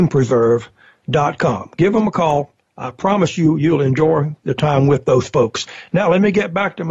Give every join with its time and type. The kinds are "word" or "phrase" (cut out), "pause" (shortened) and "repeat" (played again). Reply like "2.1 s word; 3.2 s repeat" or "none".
none